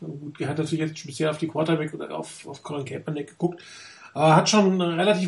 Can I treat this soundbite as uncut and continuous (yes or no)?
no